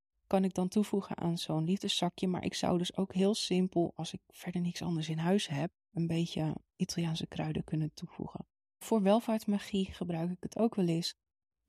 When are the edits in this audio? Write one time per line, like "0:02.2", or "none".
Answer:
none

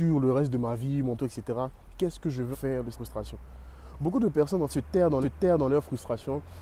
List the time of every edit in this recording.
0:01.2
0:02.5
0:02.9
0:04.7
0:05.2

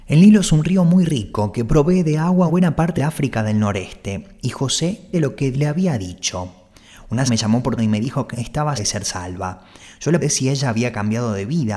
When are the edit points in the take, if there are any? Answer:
0:02.5
0:03.0
0:05.1
0:05.5
0:07.3
0:07.8
0:08.3
0:08.8
0:10.2

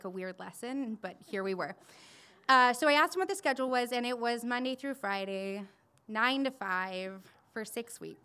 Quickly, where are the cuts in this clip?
none

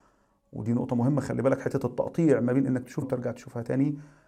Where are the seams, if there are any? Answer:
0:03.0

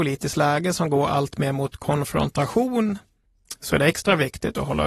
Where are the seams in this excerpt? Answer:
none

